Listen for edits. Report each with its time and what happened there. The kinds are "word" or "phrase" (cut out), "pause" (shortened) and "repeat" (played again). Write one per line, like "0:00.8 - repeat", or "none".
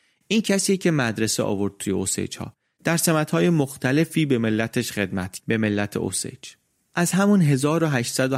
0:05.4 - word